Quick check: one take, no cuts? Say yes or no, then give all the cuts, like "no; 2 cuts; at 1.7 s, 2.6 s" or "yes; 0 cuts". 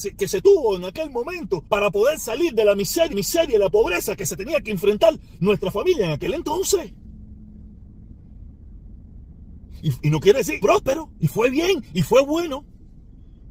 no; 3 cuts; at 1.7 s, 3.1 s, 10.6 s